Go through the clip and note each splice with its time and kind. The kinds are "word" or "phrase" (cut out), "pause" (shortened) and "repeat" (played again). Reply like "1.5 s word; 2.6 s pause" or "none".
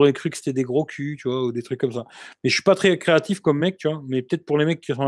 none